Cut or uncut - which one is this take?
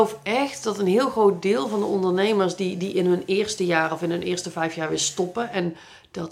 uncut